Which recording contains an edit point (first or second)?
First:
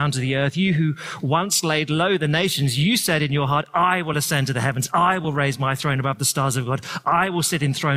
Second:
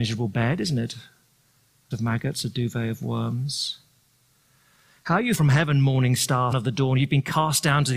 second